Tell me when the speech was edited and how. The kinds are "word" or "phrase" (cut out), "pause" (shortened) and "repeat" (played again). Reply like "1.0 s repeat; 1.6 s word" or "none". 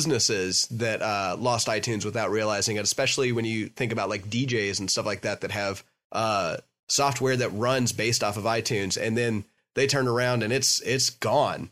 none